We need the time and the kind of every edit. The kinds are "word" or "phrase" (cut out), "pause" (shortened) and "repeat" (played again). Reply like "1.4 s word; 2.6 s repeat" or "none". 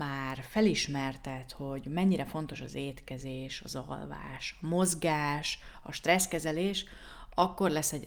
none